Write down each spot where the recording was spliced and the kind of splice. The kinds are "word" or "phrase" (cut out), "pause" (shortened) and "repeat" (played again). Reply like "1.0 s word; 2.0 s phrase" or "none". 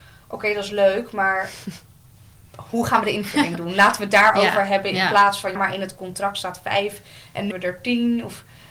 5.6 s word; 7.5 s word